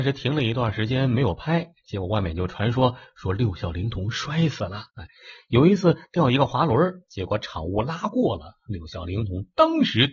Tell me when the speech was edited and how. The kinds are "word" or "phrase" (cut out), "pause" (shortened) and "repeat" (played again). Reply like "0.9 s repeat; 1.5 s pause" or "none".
4.9 s pause